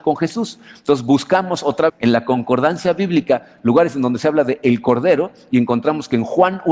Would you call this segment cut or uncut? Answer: cut